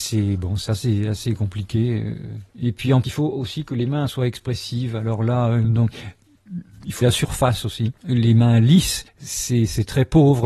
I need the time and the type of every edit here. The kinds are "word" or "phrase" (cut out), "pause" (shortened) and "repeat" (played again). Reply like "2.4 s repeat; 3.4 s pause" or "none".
3.0 s word; 4.1 s word; 7.0 s word; 9.1 s pause